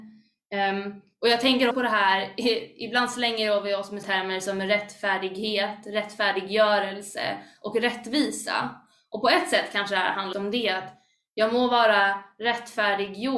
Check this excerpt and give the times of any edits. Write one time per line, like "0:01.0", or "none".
0:01.7
0:04.0
0:10.3